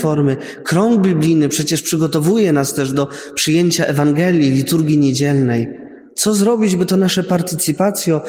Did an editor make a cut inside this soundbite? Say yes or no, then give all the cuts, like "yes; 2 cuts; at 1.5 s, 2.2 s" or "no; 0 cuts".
no; 0 cuts